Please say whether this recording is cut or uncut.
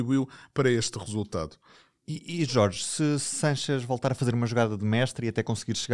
uncut